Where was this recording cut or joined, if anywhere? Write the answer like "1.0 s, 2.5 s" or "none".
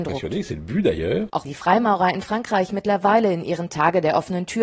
1.4 s, 3.7 s